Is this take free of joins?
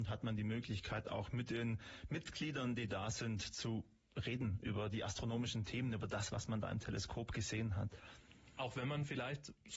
yes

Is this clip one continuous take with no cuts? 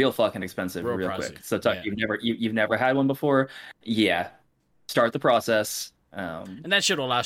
yes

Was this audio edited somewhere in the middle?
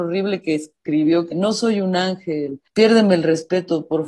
yes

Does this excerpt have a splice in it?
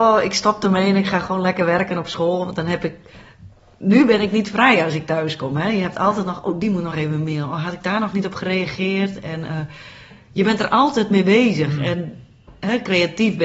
no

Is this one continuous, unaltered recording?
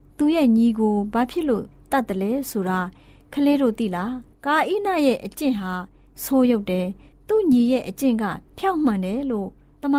yes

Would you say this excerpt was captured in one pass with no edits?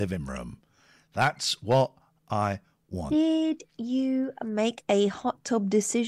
yes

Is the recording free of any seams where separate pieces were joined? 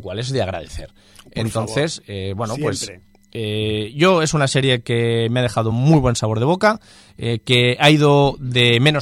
yes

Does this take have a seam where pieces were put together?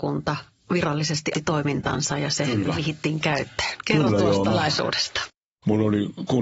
yes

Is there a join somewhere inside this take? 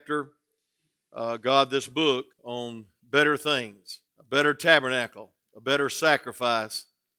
yes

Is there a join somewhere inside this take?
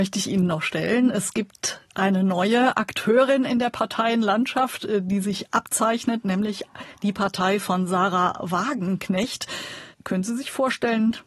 yes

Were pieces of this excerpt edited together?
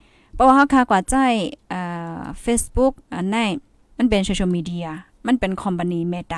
yes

